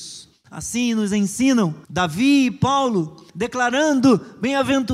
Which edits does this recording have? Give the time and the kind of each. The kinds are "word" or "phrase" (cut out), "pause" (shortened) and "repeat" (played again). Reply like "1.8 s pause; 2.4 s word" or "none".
1.8 s pause; 3.3 s pause